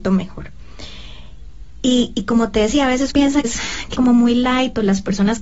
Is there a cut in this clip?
yes; 3 cuts; at 3.1 s, 3.4 s, 4.0 s

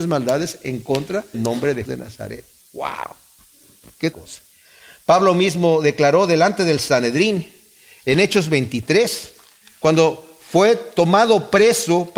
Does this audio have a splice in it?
yes; 3 cuts; at 1.3 s, 1.9 s, 4.1 s

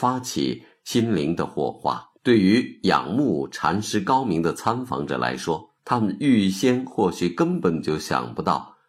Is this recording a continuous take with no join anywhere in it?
no; 2 cuts; at 2.2 s, 5.8 s

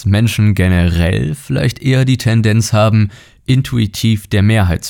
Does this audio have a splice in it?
no; 0 cuts

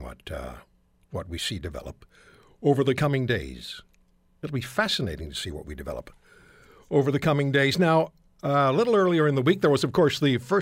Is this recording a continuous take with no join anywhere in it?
yes; 0 cuts

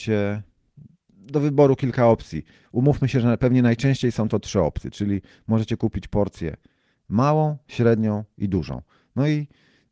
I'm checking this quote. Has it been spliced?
no; 0 cuts

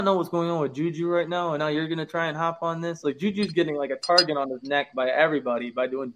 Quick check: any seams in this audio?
no; 0 cuts

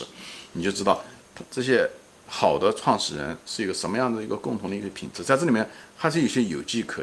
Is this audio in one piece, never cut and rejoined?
yes; 0 cuts

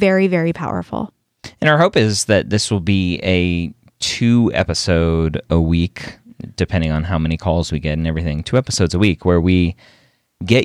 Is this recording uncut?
yes; 0 cuts

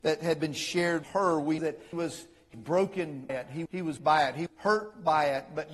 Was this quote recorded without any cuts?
no; 8 cuts; at 1.0 s, 1.6 s, 1.9 s, 2.5 s, 3.3 s, 3.7 s, 4.0 s, 4.5 s

